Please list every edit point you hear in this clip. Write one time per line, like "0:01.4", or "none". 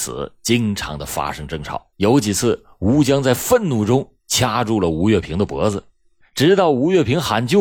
0:01.9